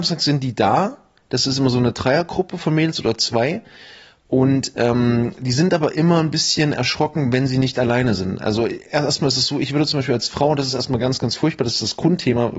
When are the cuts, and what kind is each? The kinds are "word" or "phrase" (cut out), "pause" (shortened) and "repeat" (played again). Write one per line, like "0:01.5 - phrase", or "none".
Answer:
none